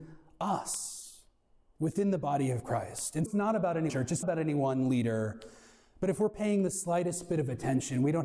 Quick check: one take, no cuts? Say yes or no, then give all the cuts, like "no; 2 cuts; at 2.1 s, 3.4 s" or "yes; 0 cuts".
no; 3 cuts; at 3.3 s, 3.9 s, 4.2 s